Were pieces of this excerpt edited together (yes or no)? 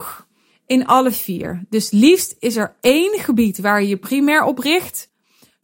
no